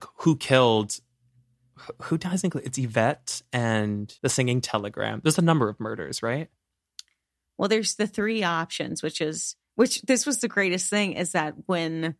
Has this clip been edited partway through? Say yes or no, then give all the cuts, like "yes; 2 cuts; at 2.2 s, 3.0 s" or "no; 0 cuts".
yes; 2 cuts; at 4.2 s, 9.6 s